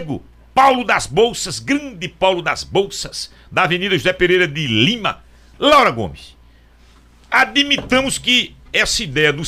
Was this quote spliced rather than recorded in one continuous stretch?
no; 0 cuts

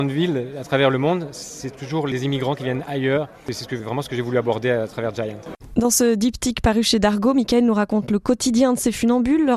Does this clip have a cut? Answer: no; 0 cuts

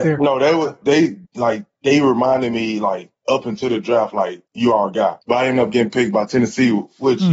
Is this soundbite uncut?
no; 3 cuts; at 1.2 s, 4.5 s, 5.2 s

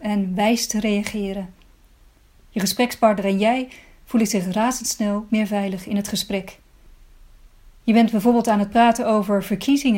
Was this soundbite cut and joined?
yes; 1 cut; at 5.3 s

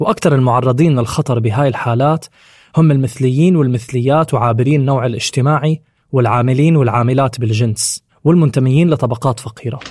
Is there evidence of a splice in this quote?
no; 0 cuts

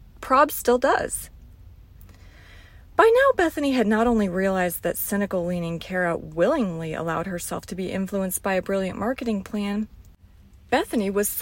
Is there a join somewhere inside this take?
no; 0 cuts

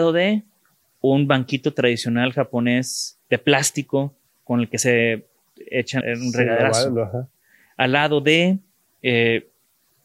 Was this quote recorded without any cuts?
no; 2 cuts; at 3.2 s, 6.0 s

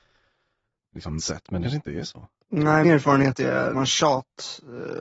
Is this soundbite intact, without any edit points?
no; 4 cuts; at 1.2 s, 1.6 s, 2.8 s, 3.7 s

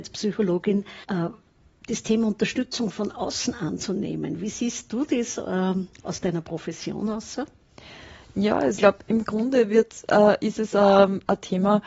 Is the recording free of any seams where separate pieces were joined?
no; 2 cuts; at 1.0 s, 8.8 s

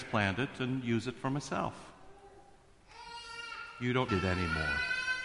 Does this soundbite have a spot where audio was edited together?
yes; 1 cut; at 4.1 s

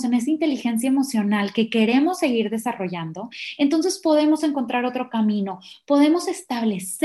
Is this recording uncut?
yes; 0 cuts

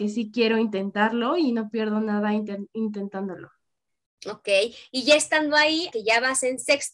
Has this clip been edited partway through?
yes; 1 cut; at 5.9 s

